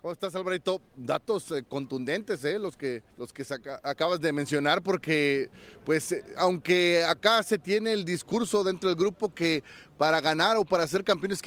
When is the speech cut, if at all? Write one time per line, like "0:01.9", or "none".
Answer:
0:03.1